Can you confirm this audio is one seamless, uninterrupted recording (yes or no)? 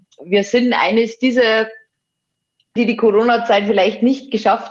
no